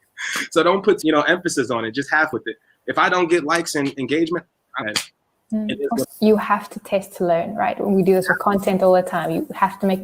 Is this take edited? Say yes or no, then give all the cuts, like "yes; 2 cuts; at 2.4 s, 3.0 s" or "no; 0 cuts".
yes; 4 cuts; at 1.0 s, 2.3 s, 4.8 s, 6.0 s